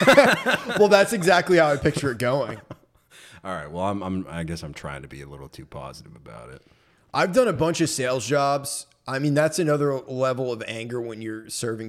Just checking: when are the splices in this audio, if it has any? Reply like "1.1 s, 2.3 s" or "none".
none